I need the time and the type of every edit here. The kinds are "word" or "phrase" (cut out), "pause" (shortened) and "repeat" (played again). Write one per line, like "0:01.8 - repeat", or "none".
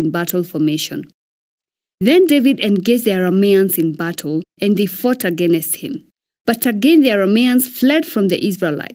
none